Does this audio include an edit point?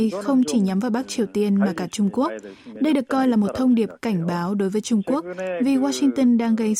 no; 0 cuts

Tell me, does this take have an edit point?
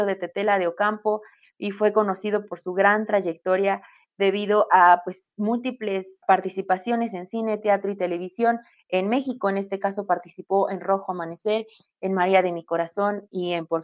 yes; 1 cut; at 6.2 s

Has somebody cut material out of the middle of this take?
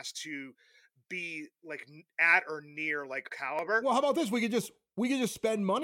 yes; 1 cut; at 3.3 s

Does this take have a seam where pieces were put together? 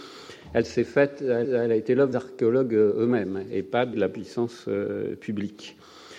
yes; 3 cuts; at 1.4 s, 2.1 s, 3.9 s

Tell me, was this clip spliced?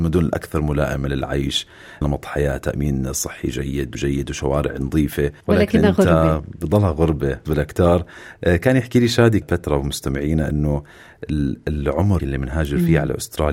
yes; 6 cuts; at 2.0 s, 3.9 s, 5.4 s, 7.5 s, 9.4 s, 12.2 s

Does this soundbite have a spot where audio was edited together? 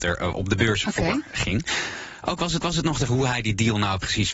yes; 2 cuts; at 2.6 s, 3.1 s

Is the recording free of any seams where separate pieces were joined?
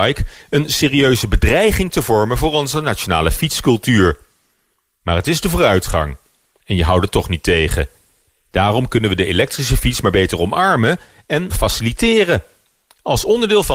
no; 1 cut; at 11.5 s

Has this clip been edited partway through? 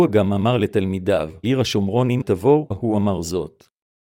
yes; 3 cuts; at 1.4 s, 2.2 s, 2.7 s

